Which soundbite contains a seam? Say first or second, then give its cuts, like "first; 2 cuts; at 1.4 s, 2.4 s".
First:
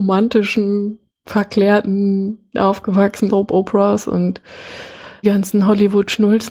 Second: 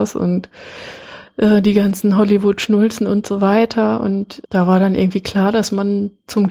first; 3 cuts; at 2.5 s, 3.3 s, 5.2 s